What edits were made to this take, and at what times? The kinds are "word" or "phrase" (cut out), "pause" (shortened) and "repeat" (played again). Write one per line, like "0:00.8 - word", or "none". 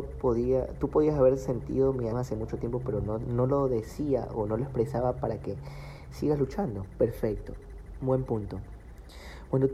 0:02.1 - word